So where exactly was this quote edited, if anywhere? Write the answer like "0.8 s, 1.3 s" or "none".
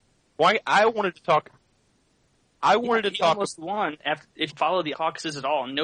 4.5 s, 4.9 s